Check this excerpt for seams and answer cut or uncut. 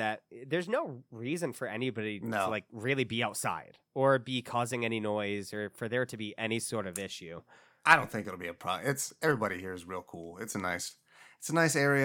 uncut